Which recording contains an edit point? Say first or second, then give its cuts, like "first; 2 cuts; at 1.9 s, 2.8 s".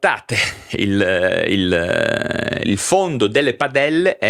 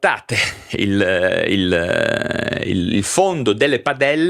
first; 1 cut; at 2.6 s